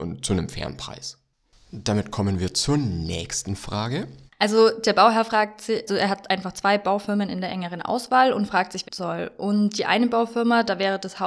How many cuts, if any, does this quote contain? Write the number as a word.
three